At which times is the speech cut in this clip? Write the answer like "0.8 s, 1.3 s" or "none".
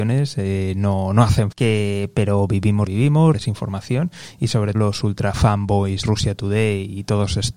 1.5 s, 2.9 s, 3.3 s, 4.7 s, 6.0 s